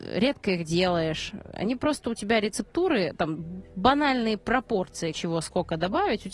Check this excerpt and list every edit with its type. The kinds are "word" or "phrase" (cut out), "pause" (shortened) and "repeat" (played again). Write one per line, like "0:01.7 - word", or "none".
0:05.1 - word